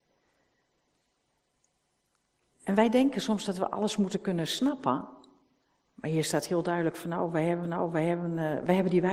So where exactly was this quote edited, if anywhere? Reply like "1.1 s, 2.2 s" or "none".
7.6 s